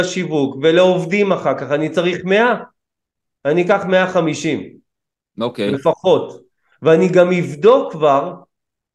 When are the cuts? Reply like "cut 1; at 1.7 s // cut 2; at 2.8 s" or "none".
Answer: none